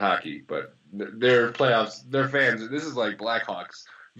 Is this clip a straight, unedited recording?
yes; 0 cuts

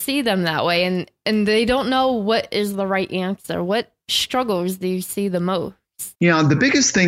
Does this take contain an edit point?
yes; 1 cut; at 6.1 s

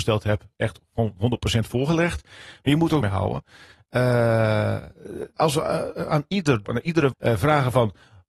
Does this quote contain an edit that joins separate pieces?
yes; 4 cuts; at 3.0 s, 5.4 s, 6.6 s, 7.1 s

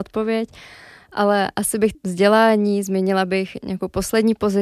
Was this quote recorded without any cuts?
no; 1 cut; at 1.9 s

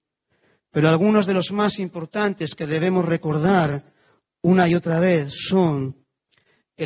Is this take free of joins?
yes; 0 cuts

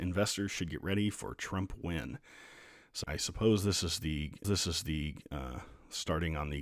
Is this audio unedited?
no; 2 cuts; at 3.0 s, 4.4 s

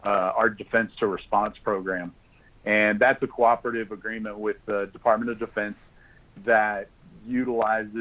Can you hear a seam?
no; 0 cuts

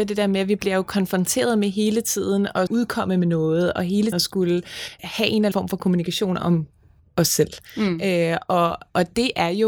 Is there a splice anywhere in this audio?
yes; 4 cuts; at 2.7 s, 4.1 s, 5.0 s, 5.5 s

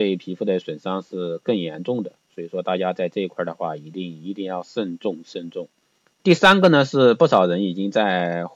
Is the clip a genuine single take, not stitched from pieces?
no; 1 cut; at 5.8 s

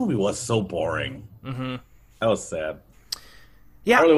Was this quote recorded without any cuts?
yes; 0 cuts

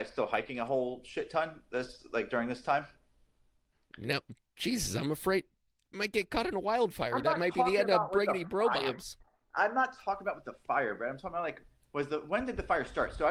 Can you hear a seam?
no; 0 cuts

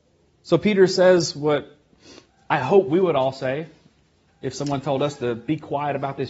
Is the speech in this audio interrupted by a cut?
no; 0 cuts

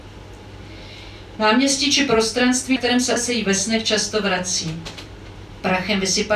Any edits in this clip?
yes; 2 cuts; at 2.8 s, 3.2 s

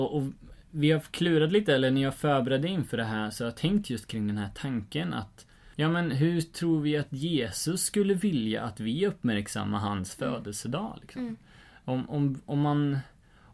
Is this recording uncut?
no; 1 cut; at 5.7 s

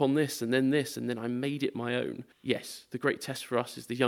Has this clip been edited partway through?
yes; 1 cut; at 2.3 s

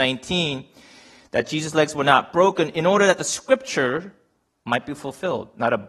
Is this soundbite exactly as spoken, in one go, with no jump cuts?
yes; 0 cuts

